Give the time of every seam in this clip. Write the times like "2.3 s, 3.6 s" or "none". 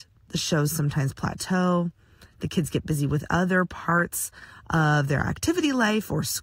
none

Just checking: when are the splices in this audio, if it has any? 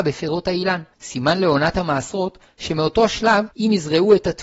0.9 s, 3.5 s

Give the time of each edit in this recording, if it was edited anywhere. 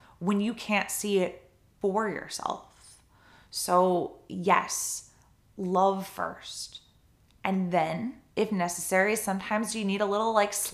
8.3 s

